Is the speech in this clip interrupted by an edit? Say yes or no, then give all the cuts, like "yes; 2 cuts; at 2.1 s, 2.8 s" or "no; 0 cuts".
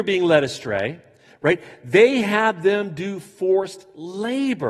no; 0 cuts